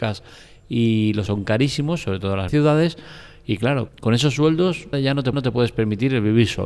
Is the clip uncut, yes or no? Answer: no